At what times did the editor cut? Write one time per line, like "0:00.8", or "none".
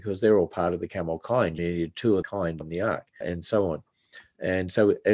0:01.6
0:02.2
0:02.6
0:03.2